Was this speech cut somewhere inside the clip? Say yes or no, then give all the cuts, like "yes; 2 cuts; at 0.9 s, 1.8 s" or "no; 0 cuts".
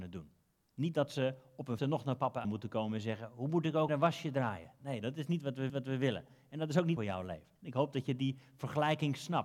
yes; 6 cuts; at 1.8 s, 2.4 s, 3.9 s, 5.7 s, 7.0 s, 7.6 s